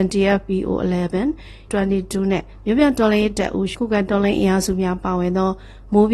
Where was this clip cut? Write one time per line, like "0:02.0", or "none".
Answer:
0:01.7
0:03.7